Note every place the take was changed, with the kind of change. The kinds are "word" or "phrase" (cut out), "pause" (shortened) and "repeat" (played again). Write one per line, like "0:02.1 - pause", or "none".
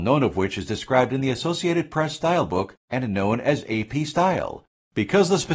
0:02.8 - pause